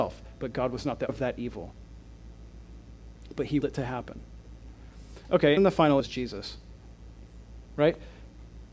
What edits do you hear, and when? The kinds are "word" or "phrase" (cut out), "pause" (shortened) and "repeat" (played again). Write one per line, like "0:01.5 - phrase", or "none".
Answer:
0:01.1 - word
0:03.6 - word
0:05.6 - word
0:06.0 - word